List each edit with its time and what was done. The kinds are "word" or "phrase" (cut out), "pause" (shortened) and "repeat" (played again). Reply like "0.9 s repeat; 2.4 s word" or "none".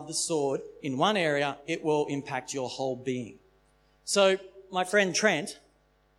none